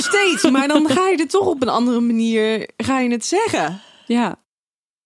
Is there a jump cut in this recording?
no; 0 cuts

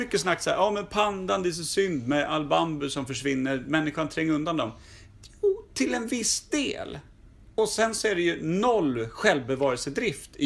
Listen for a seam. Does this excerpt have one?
no; 0 cuts

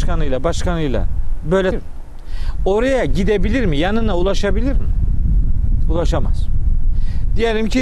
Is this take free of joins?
no; 1 cut; at 1.7 s

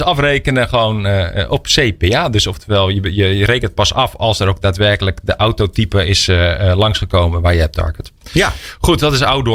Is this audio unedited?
yes; 0 cuts

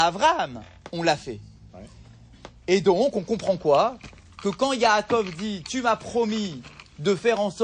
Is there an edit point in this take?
no; 0 cuts

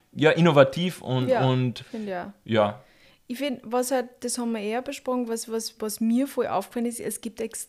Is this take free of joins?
yes; 0 cuts

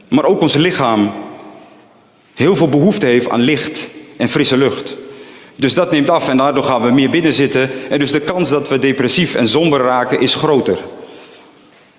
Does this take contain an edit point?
no; 0 cuts

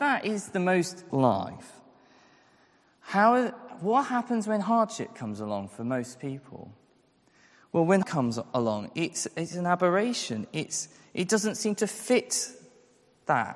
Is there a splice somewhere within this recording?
yes; 2 cuts; at 1.1 s, 8.0 s

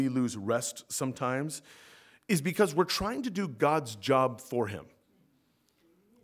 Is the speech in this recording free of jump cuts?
yes; 0 cuts

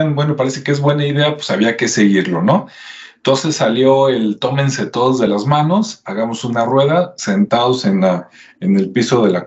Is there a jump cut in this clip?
no; 0 cuts

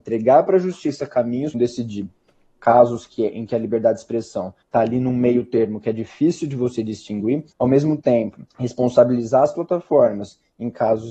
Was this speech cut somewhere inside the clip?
yes; 4 cuts; at 1.5 s, 4.6 s, 7.5 s, 8.5 s

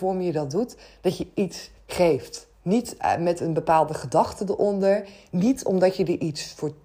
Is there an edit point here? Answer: yes; 1 cut; at 2.5 s

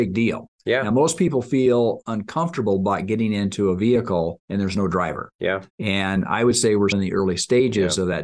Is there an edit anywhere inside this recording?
yes; 3 cuts; at 4.4 s, 5.7 s, 6.9 s

